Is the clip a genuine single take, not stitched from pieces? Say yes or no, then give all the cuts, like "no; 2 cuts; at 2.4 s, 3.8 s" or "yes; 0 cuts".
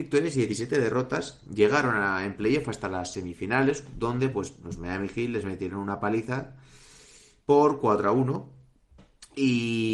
yes; 0 cuts